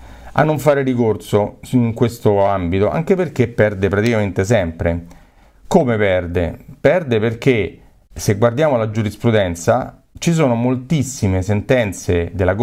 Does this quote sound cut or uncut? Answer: uncut